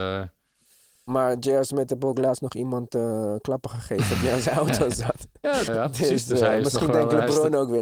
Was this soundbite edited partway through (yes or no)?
yes